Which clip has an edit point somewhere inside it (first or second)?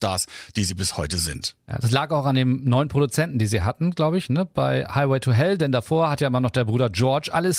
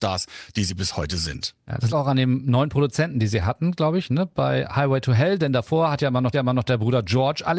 second